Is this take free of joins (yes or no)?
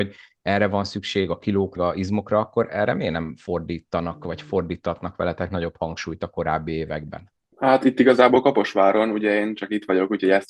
no